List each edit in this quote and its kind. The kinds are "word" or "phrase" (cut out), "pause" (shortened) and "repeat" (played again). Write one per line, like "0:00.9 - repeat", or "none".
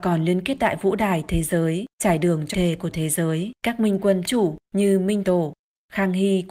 0:01.9 - pause
0:02.5 - phrase
0:02.9 - word
0:03.6 - pause
0:04.2 - word
0:04.6 - pause
0:05.2 - word